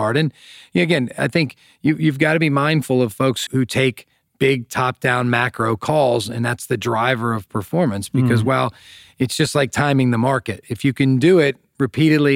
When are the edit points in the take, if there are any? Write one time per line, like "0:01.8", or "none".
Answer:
0:03.5